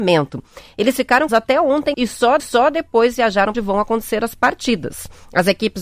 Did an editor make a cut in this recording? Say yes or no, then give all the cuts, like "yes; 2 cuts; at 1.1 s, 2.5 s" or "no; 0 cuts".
yes; 4 cuts; at 1.3 s, 1.9 s, 2.4 s, 3.5 s